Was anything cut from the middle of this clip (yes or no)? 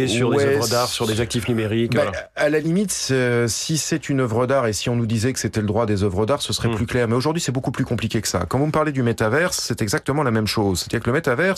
no